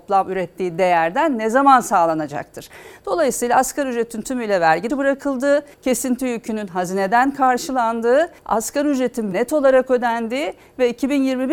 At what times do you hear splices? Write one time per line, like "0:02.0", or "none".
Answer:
0:04.9
0:05.7
0:08.4
0:09.3